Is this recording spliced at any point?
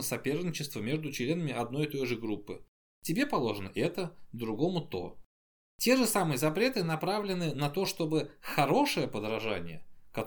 no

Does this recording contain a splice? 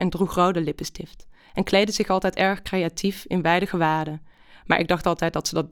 no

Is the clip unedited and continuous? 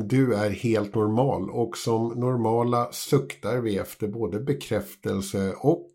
yes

